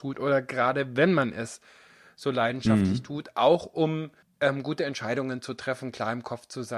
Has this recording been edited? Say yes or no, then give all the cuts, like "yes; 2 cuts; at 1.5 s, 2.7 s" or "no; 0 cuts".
no; 0 cuts